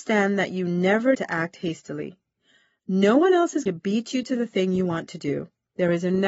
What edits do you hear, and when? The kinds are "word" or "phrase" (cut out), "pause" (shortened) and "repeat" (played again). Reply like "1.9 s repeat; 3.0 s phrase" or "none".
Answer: 1.1 s word; 3.7 s word